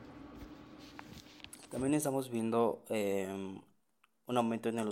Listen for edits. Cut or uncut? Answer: uncut